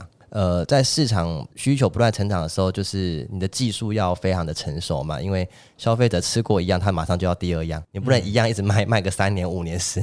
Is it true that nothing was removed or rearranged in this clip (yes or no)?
yes